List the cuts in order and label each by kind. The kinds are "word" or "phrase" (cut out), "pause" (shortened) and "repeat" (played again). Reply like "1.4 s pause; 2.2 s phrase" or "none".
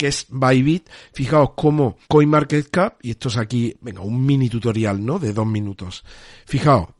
2.0 s pause

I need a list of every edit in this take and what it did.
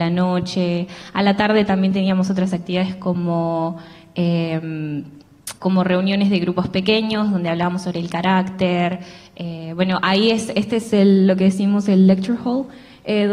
5.5 s pause

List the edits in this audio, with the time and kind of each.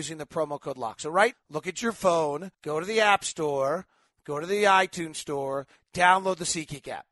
1.3 s word; 2.5 s pause

